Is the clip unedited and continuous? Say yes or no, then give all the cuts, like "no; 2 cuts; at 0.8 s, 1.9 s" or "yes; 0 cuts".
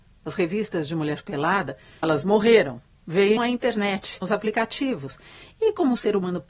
no; 3 cuts; at 2.0 s, 3.4 s, 4.2 s